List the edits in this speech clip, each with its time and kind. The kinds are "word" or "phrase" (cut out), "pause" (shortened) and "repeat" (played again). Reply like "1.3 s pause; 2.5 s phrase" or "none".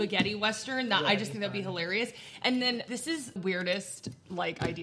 2.9 s word; 3.4 s word